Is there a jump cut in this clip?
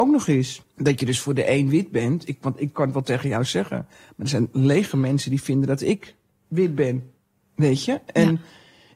no; 0 cuts

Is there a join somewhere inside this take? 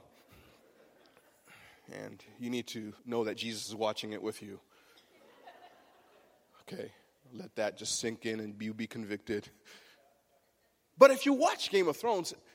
yes; 1 cut; at 3.0 s

